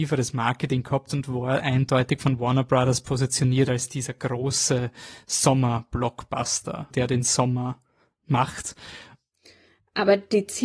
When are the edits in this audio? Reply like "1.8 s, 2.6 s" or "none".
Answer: 6.9 s